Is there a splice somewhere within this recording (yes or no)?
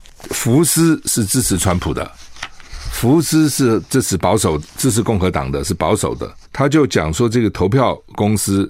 yes